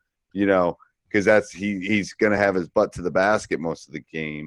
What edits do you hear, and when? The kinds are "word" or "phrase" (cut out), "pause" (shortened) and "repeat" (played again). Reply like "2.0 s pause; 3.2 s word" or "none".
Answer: none